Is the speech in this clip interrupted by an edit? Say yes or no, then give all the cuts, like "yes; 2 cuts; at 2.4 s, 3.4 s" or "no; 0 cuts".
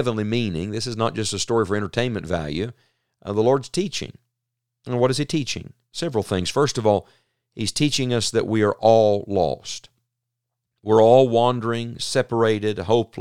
no; 0 cuts